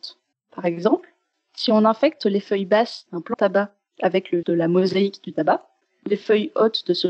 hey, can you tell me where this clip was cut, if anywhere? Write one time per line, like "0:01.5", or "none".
0:03.3
0:04.4